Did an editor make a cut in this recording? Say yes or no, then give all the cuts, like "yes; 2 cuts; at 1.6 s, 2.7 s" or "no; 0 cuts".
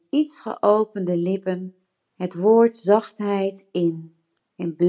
no; 0 cuts